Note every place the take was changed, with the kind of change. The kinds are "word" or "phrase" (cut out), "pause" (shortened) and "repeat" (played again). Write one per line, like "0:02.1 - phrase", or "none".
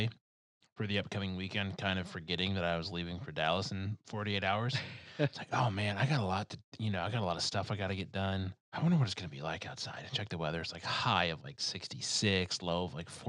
0:08.6 - pause